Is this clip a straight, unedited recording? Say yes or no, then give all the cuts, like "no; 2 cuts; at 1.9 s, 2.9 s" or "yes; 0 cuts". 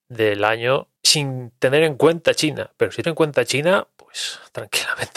no; 2 cuts; at 1.0 s, 3.0 s